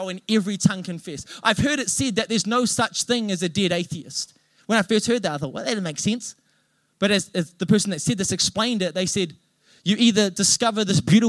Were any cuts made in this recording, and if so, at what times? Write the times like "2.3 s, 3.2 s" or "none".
none